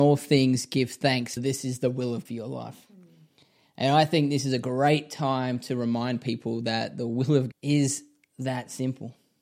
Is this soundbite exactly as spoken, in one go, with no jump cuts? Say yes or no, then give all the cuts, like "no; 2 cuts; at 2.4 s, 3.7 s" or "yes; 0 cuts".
no; 3 cuts; at 1.4 s, 2.3 s, 7.5 s